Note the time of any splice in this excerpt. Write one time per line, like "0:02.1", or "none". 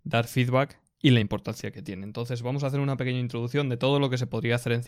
none